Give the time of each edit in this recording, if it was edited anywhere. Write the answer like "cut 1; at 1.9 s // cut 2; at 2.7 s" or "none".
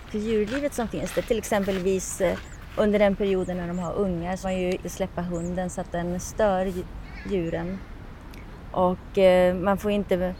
cut 1; at 4.4 s // cut 2; at 4.8 s